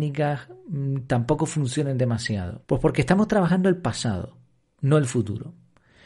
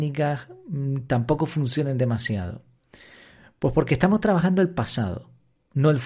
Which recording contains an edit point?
first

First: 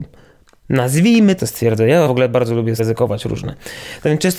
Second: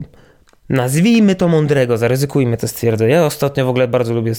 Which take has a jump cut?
first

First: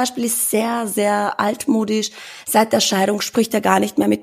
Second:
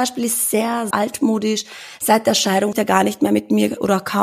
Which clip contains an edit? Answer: second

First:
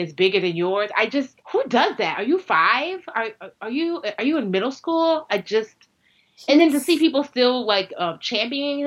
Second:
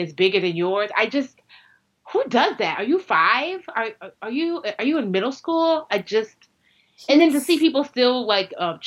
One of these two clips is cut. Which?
first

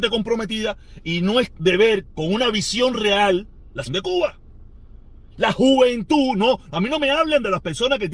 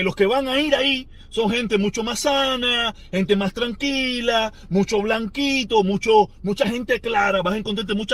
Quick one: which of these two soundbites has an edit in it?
first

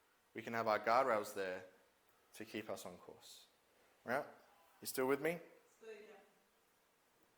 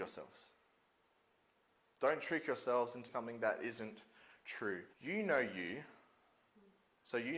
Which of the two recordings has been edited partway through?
second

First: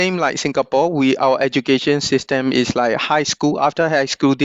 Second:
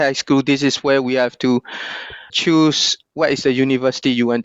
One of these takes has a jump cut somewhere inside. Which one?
second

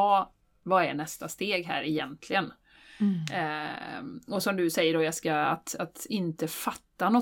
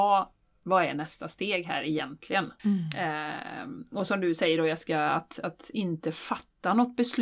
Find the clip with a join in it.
second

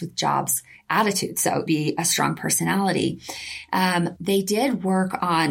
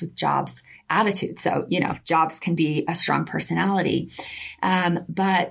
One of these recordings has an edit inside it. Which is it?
first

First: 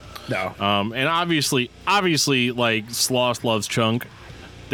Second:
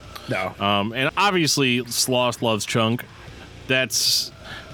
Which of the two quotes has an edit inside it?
second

